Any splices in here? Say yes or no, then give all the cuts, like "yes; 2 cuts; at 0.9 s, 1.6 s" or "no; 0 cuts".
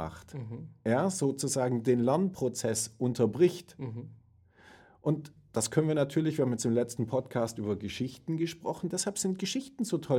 no; 0 cuts